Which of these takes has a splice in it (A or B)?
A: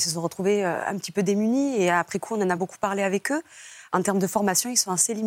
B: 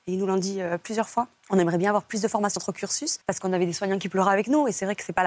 B